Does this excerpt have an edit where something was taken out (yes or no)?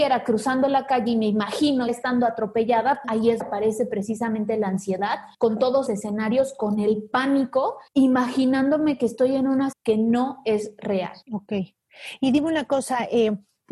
yes